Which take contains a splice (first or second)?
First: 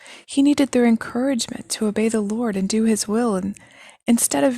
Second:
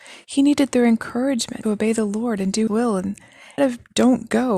second